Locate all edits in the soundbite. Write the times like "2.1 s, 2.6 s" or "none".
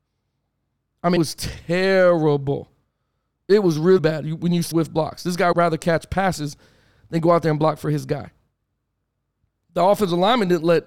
1.2 s, 4.0 s, 4.7 s, 5.5 s